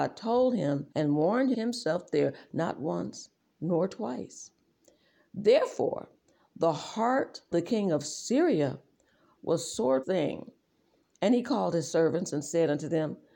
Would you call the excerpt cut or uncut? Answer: cut